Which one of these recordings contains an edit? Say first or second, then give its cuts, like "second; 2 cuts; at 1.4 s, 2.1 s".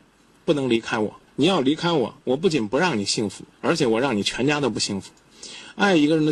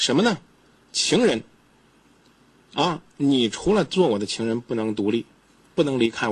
first; 3 cuts; at 1.3 s, 2.2 s, 3.5 s